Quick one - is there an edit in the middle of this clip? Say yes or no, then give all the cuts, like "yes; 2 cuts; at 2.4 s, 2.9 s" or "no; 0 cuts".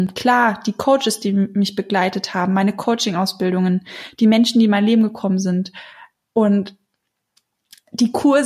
no; 0 cuts